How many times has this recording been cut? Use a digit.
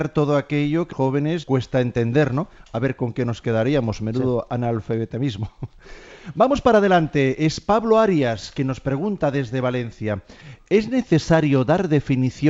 2